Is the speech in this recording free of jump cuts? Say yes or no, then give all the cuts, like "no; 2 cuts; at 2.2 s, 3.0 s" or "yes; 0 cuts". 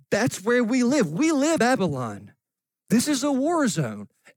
no; 1 cut; at 1.6 s